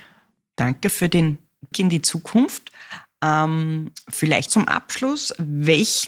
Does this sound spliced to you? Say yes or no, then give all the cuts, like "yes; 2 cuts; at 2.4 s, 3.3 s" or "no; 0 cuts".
yes; 2 cuts; at 1.7 s, 4.5 s